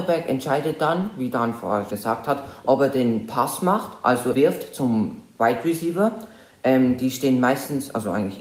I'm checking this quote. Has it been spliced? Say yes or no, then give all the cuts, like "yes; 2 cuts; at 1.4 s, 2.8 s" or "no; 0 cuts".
yes; 2 cuts; at 1.9 s, 4.3 s